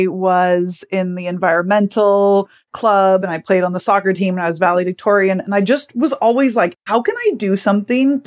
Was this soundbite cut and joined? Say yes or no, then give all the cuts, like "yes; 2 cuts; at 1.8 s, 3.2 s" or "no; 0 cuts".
no; 0 cuts